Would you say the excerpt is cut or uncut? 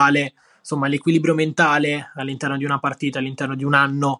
uncut